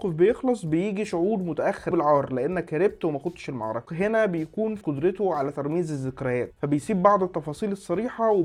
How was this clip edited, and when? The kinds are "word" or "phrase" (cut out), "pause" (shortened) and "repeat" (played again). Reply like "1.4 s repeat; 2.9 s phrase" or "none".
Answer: 1.9 s phrase; 3.9 s word; 4.8 s word